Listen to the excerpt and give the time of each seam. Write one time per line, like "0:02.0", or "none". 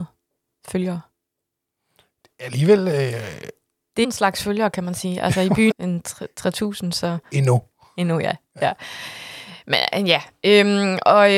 0:04.0
0:05.7

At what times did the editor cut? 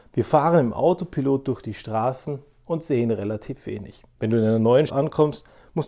0:04.1
0:04.9

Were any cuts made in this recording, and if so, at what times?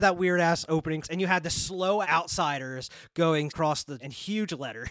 0:01.0
0:02.0
0:03.5
0:04.0

